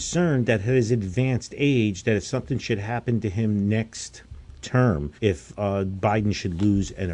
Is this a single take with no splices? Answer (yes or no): no